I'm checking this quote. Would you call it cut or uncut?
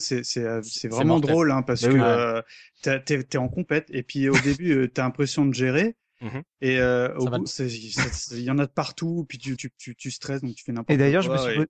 cut